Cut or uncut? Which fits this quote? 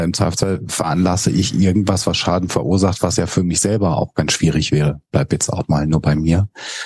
uncut